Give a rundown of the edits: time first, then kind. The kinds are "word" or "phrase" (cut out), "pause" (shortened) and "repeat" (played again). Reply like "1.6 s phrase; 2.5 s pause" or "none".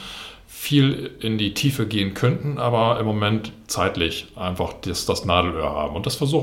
none